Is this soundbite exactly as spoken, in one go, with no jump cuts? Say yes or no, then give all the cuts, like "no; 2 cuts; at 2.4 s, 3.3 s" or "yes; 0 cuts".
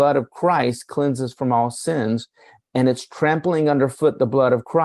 yes; 0 cuts